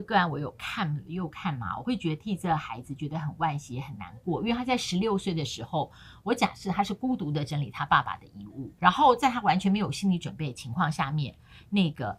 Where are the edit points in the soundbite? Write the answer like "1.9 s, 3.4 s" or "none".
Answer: 8.8 s